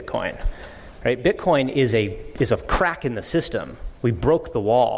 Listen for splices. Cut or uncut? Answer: uncut